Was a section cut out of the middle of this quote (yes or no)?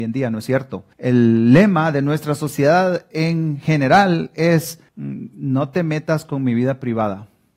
yes